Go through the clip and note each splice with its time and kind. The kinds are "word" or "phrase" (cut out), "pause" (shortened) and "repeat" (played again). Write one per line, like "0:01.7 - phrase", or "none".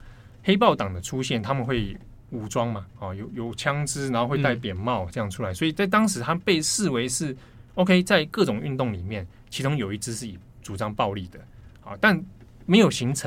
0:02.9 - pause